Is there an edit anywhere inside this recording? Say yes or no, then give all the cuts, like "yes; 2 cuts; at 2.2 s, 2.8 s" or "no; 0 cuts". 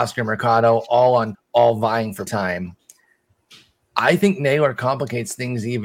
yes; 2 cuts; at 1.3 s, 2.3 s